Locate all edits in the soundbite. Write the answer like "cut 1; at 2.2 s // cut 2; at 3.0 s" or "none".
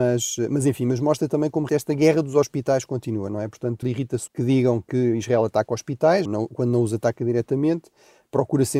cut 1; at 1.7 s // cut 2; at 3.8 s // cut 3; at 4.3 s // cut 4; at 6.2 s